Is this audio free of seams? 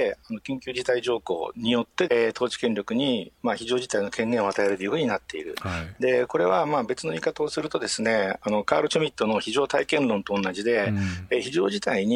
no; 1 cut; at 2.1 s

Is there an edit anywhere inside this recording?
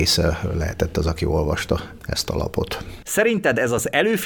no; 0 cuts

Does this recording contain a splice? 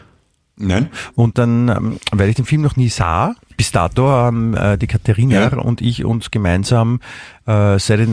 yes; 2 cuts; at 1.3 s, 3.5 s

